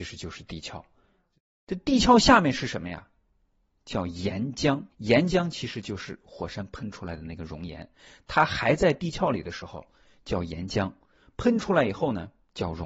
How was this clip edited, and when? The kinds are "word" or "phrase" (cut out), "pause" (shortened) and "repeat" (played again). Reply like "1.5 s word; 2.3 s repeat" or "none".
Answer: 4.9 s pause